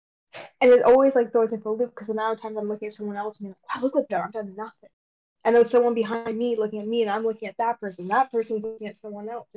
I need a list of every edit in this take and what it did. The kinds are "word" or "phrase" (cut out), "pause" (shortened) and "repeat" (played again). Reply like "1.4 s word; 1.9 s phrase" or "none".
4.1 s word